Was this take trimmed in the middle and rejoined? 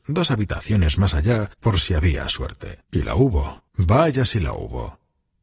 yes; 3 cuts; at 1.5 s, 2.8 s, 3.7 s

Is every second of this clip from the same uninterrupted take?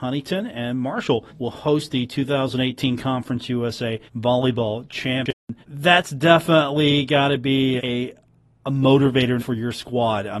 no; 6 cuts; at 1.3 s, 4.1 s, 5.6 s, 7.8 s, 8.4 s, 9.4 s

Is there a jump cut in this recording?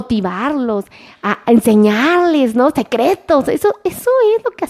no; 0 cuts

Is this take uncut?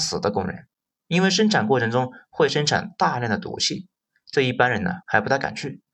no; 1 cut; at 5.0 s

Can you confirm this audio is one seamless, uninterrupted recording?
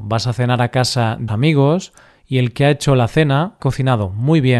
no; 2 cuts; at 1.3 s, 3.6 s

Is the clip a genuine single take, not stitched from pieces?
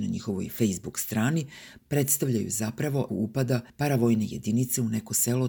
no; 2 cuts; at 3.1 s, 3.7 s

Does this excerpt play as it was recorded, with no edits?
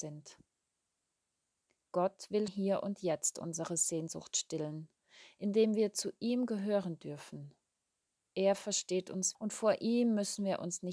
no; 2 cuts; at 2.5 s, 9.3 s

